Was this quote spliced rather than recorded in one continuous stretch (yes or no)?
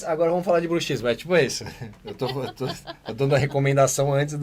no